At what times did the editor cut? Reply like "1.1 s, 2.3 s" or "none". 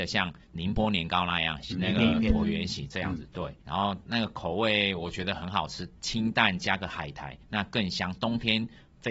1.7 s, 3.6 s